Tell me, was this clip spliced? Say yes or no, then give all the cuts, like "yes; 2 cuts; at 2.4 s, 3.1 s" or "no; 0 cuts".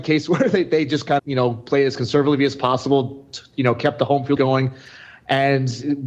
yes; 3 cuts; at 1.2 s, 3.5 s, 4.4 s